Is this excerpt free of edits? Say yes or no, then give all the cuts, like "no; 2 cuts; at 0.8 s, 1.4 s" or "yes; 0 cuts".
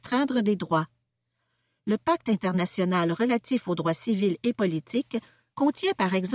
yes; 0 cuts